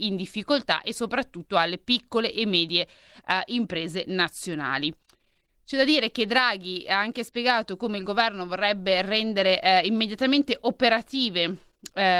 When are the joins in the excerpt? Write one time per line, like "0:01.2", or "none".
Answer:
none